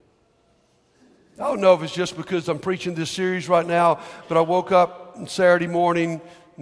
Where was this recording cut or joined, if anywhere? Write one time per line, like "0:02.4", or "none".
none